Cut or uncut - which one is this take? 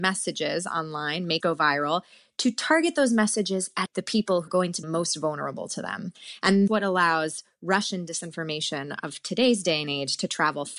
cut